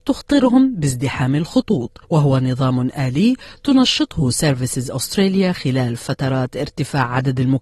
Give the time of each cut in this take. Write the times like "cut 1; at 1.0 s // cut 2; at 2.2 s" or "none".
cut 1; at 2.0 s